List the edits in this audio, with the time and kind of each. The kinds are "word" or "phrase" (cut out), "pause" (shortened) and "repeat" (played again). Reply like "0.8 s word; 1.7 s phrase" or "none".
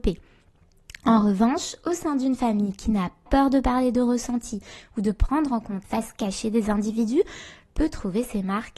3.3 s word; 5.8 s word; 7.7 s phrase